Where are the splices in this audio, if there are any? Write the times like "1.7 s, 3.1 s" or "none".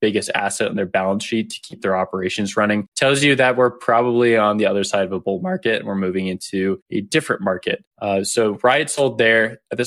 2.9 s, 6.8 s, 7.9 s